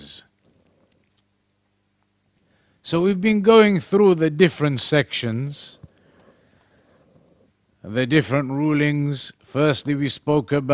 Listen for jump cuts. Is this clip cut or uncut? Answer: uncut